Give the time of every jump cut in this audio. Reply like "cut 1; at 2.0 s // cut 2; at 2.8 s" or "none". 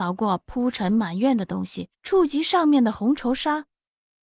cut 1; at 1.9 s